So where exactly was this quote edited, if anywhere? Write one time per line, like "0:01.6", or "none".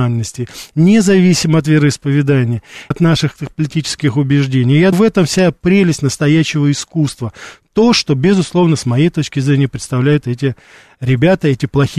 0:02.9
0:04.9